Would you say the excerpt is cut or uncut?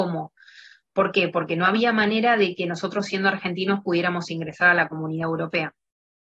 uncut